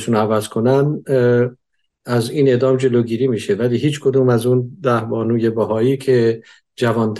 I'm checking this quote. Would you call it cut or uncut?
uncut